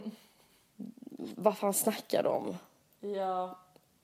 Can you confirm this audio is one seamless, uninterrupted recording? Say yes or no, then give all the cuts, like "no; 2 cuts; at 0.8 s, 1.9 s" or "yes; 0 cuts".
yes; 0 cuts